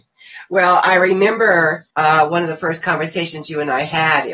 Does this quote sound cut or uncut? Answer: cut